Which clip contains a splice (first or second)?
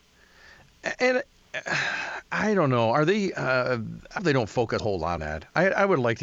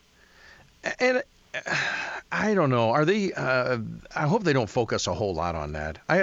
first